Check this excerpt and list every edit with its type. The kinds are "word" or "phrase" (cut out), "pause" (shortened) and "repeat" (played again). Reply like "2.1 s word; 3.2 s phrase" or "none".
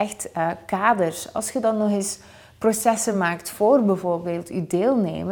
none